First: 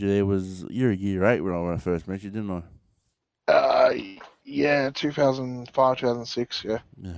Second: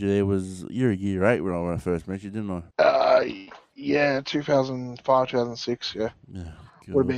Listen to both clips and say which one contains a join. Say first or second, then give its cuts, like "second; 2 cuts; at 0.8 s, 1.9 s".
second; 1 cut; at 2.7 s